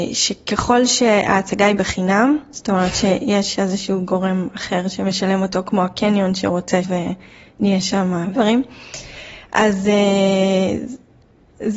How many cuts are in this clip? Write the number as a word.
two